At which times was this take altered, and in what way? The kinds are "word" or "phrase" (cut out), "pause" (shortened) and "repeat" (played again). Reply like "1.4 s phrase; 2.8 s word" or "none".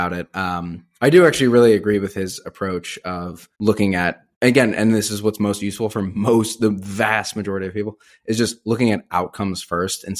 3.5 s pause; 4.3 s pause